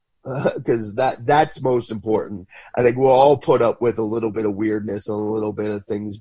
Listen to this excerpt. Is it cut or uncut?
uncut